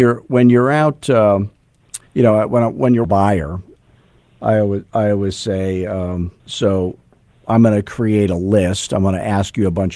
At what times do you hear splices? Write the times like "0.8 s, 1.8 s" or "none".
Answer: 2.1 s, 3.0 s, 6.4 s

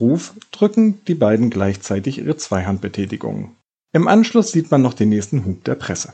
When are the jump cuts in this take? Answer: none

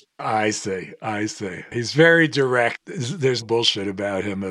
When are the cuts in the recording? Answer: 1.7 s, 3.4 s

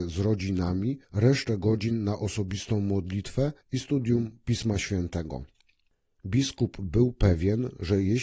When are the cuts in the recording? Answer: 1.0 s, 3.6 s

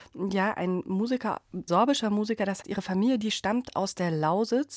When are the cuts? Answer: 1.7 s, 2.6 s

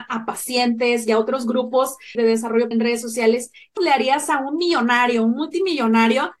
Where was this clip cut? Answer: 2.1 s, 2.7 s, 3.8 s

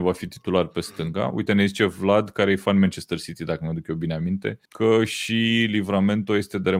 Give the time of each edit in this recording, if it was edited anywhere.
4.7 s

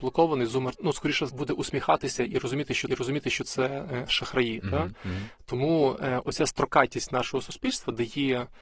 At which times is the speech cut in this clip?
1.3 s, 2.9 s

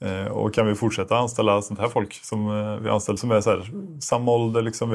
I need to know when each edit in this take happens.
3.2 s

